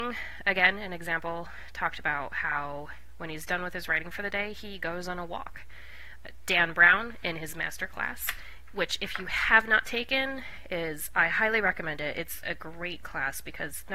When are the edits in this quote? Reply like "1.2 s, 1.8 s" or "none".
none